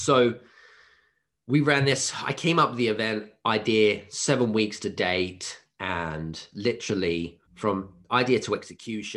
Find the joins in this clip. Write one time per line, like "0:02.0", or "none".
0:07.5

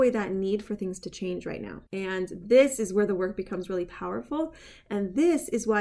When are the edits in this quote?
0:01.9

